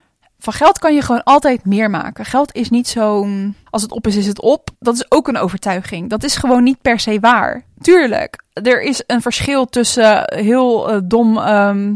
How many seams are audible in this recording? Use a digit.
2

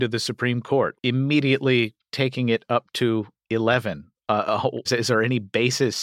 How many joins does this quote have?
2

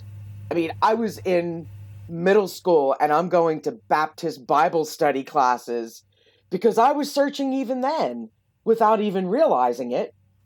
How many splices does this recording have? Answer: 0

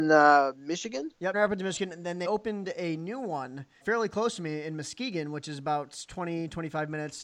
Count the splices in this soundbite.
3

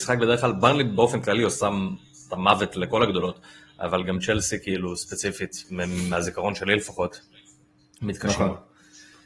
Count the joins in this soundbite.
0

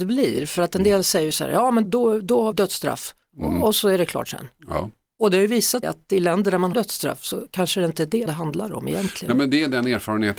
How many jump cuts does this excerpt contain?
5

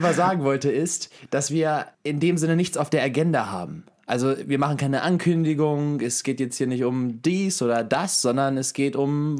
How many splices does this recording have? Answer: 1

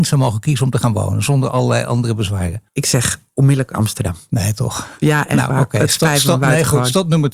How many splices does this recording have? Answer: 1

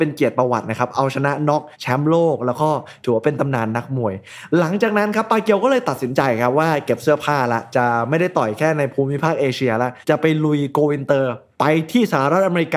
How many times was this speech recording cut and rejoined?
2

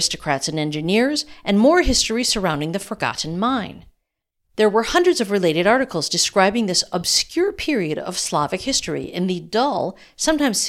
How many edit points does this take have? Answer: 0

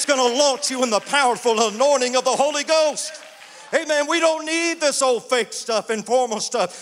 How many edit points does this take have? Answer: 0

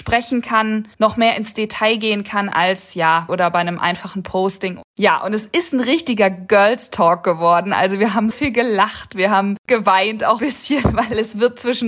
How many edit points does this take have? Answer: 5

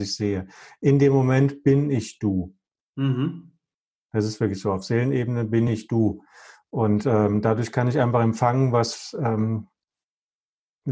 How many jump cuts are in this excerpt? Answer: 0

